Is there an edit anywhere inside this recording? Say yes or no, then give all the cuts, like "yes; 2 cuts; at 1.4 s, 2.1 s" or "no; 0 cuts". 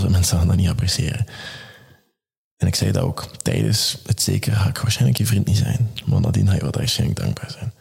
no; 0 cuts